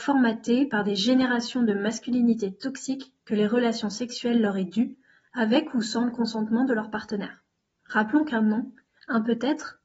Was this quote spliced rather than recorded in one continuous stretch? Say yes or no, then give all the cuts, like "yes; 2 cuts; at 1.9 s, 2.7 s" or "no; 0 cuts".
no; 0 cuts